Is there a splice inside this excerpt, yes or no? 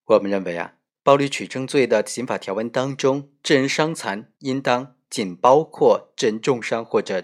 yes